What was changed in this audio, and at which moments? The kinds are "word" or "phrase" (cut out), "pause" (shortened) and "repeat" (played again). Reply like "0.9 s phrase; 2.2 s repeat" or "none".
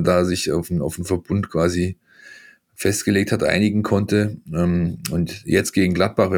none